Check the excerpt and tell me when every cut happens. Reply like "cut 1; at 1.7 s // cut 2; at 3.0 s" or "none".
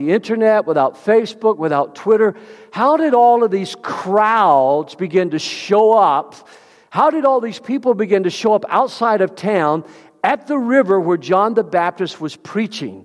none

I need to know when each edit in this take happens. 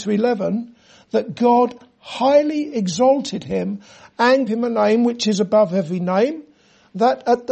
cut 1; at 4.5 s

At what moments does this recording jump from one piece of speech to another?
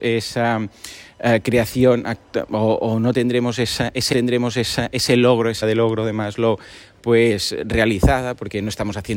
cut 1; at 4.1 s // cut 2; at 5.6 s

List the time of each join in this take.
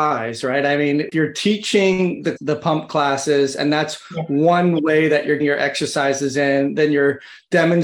cut 1; at 1.1 s // cut 2; at 2.4 s // cut 3; at 5.4 s

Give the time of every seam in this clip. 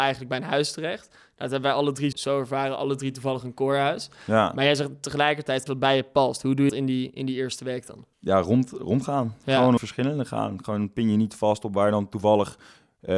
cut 1; at 2.1 s // cut 2; at 5.7 s // cut 3; at 6.7 s // cut 4; at 8.1 s // cut 5; at 9.8 s

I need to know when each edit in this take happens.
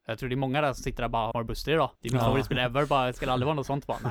cut 1; at 1.3 s // cut 2; at 2.0 s

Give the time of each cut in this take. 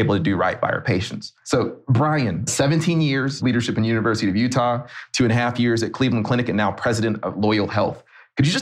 none

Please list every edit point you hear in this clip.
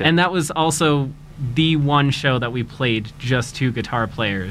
none

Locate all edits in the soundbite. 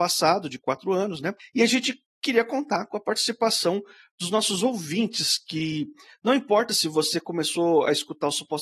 none

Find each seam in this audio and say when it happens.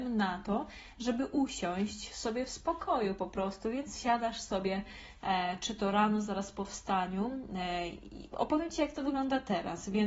none

